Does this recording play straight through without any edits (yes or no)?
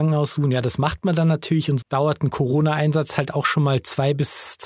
no